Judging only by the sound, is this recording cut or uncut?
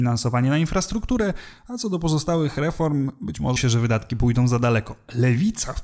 cut